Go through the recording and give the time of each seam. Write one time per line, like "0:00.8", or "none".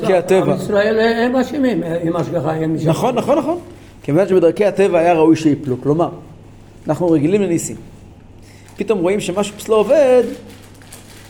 none